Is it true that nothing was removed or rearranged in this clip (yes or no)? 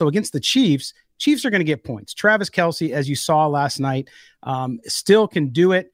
yes